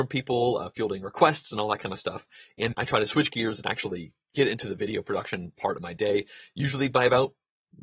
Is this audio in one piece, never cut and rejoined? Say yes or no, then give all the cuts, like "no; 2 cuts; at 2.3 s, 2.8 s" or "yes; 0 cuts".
no; 1 cut; at 2.7 s